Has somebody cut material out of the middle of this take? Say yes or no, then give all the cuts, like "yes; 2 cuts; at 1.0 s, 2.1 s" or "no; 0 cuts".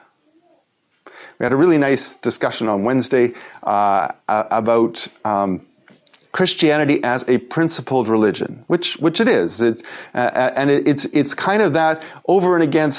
no; 0 cuts